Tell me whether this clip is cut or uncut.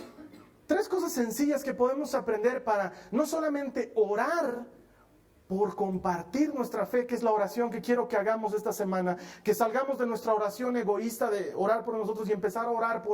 uncut